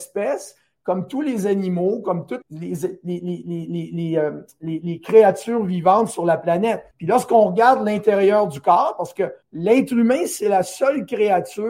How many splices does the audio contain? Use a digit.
3